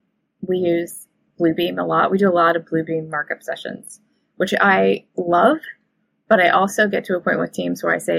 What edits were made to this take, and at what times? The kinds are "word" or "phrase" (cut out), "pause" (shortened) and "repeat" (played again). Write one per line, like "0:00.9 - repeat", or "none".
none